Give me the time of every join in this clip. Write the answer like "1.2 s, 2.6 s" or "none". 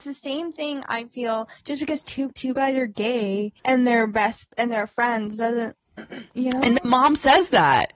2.3 s, 3.6 s, 4.5 s, 6.3 s